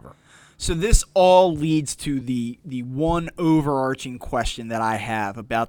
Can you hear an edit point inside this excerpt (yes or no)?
no